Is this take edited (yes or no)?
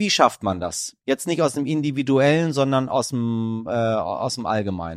no